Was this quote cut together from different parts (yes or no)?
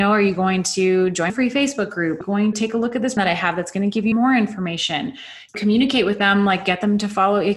yes